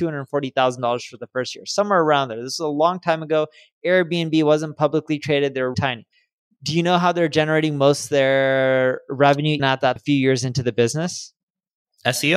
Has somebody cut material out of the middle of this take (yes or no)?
yes